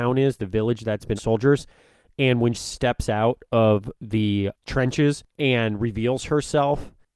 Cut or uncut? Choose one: cut